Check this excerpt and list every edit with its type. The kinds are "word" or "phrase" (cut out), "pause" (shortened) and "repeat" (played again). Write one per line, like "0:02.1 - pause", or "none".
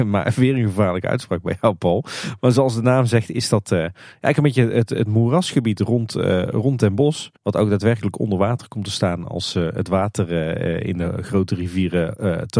0:07.4 - pause